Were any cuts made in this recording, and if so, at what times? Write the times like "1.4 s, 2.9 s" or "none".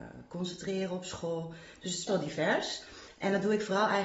2.1 s